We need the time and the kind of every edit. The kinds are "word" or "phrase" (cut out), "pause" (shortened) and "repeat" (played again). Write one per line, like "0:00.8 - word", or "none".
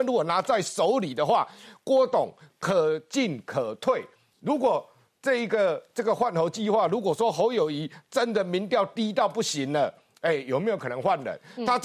none